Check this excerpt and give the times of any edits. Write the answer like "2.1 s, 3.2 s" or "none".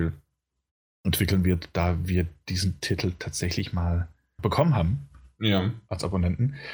4.4 s